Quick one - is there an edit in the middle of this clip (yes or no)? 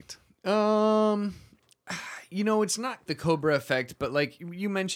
yes